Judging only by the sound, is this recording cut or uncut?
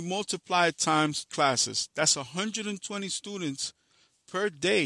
cut